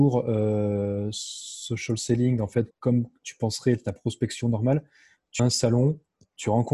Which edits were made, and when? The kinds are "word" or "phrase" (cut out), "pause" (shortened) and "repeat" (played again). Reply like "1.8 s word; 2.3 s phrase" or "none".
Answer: 2.7 s word; 5.4 s word